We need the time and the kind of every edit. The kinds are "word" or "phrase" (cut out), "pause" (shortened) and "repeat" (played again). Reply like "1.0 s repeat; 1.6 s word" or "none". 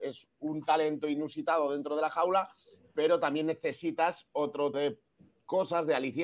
4.7 s word